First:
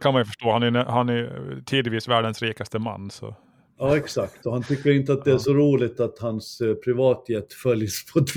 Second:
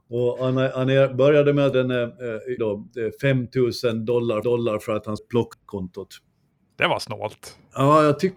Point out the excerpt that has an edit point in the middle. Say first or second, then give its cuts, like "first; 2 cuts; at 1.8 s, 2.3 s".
second; 5 cuts; at 1.7 s, 2.6 s, 4.4 s, 5.2 s, 5.5 s